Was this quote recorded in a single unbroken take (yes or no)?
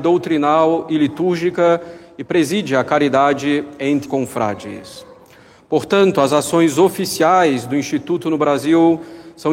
no